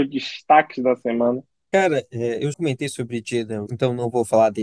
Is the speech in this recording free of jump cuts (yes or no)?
no